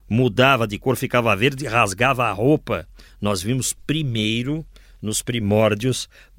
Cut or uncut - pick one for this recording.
uncut